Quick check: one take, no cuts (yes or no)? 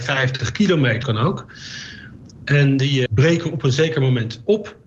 no